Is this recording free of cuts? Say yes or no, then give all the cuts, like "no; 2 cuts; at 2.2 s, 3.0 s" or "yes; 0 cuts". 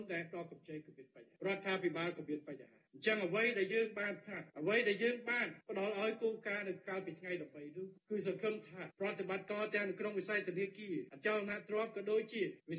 no; 2 cuts; at 4.5 s, 5.6 s